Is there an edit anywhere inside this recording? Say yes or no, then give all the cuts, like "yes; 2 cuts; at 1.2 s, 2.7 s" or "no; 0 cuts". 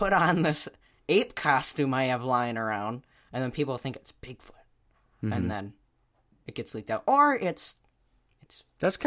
no; 0 cuts